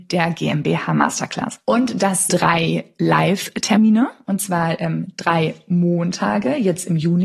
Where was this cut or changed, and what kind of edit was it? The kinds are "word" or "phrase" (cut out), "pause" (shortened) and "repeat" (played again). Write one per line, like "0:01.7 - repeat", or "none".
0:02.3 - word